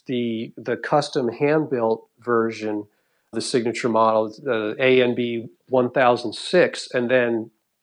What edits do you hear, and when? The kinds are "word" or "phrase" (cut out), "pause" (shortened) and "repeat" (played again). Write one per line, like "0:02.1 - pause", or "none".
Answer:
0:03.3 - word